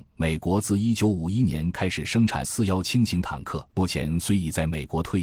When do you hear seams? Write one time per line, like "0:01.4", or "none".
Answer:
0:02.4
0:03.7